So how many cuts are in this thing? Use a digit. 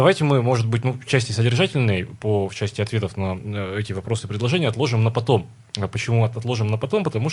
0